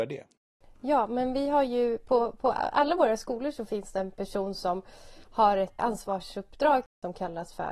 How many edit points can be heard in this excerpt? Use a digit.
1